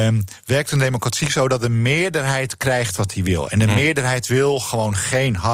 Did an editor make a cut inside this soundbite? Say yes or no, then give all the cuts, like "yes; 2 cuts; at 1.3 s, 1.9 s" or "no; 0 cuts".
no; 0 cuts